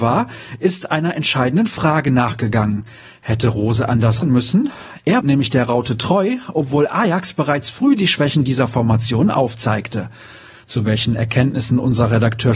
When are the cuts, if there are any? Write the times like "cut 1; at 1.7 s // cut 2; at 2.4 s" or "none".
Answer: cut 1; at 4.2 s // cut 2; at 5.2 s

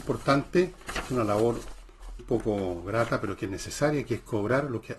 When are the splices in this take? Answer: cut 1; at 1.1 s // cut 2; at 2.2 s

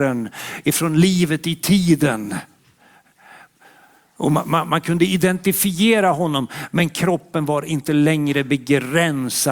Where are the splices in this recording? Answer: none

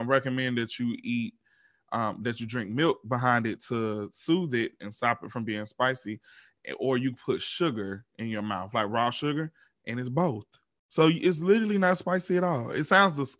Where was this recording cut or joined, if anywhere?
none

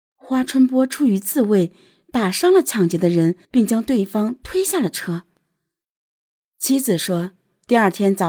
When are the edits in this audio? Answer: cut 1; at 3.4 s

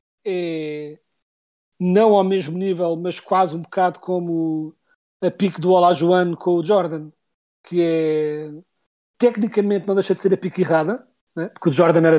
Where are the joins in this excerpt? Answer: none

